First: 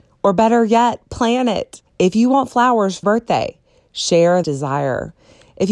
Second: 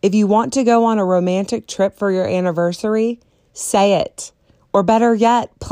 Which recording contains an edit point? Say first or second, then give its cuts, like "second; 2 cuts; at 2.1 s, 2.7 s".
first; 3 cuts; at 1.9 s, 3.0 s, 4.4 s